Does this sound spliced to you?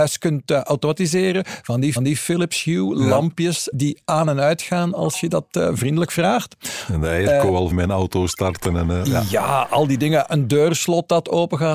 yes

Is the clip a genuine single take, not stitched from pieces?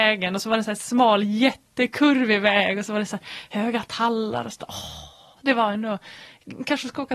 yes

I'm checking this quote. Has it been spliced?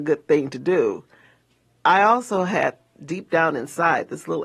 no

